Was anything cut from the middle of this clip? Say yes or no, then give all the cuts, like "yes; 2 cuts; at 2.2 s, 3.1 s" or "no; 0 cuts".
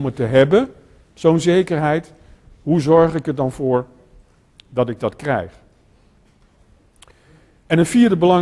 no; 0 cuts